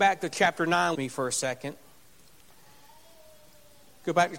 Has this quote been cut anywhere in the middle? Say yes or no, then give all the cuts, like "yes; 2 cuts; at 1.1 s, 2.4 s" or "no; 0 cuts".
yes; 1 cut; at 0.9 s